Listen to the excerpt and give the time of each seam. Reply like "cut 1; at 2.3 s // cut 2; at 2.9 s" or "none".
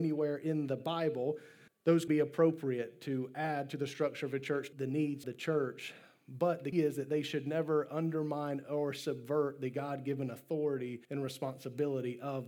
cut 1; at 1.7 s // cut 2; at 2.1 s // cut 3; at 4.7 s // cut 4; at 5.2 s // cut 5; at 6.7 s // cut 6; at 11.0 s